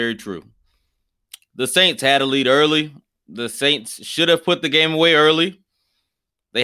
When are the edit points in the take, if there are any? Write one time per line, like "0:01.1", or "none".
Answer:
none